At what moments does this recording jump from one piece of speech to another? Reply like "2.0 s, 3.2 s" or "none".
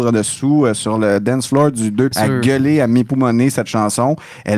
2.1 s